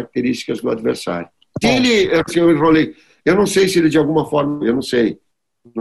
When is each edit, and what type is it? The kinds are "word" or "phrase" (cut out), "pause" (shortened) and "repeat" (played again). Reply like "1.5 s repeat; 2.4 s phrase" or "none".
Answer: 1.6 s word; 2.3 s word; 4.6 s word

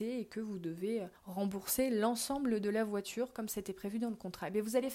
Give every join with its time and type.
1.2 s pause

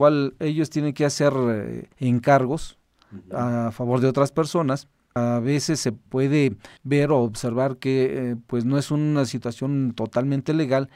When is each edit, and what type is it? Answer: 1.9 s pause; 6.8 s pause

